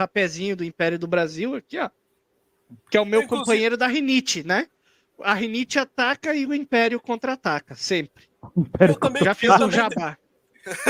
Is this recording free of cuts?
yes; 0 cuts

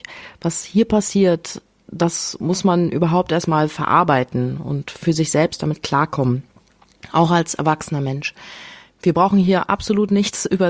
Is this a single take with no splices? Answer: yes; 0 cuts

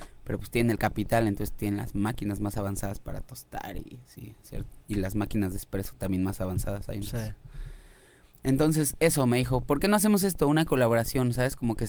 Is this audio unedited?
yes; 0 cuts

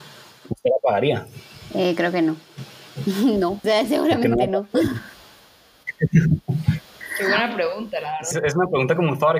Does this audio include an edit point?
yes; 2 cuts; at 3.6 s, 8.3 s

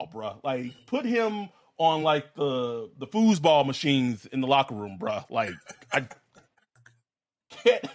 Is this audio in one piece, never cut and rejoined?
yes; 0 cuts

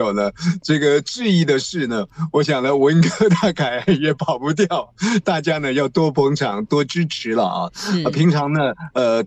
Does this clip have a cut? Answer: no; 0 cuts

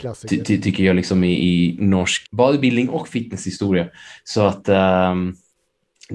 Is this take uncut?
no; 1 cut; at 2.2 s

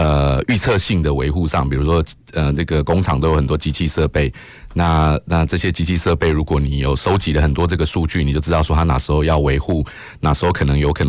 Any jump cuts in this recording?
no; 0 cuts

